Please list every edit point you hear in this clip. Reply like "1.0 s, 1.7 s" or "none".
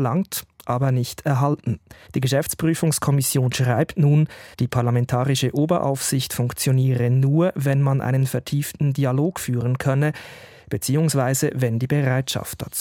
2.1 s, 4.5 s